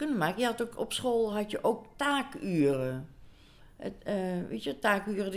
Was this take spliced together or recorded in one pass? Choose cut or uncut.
uncut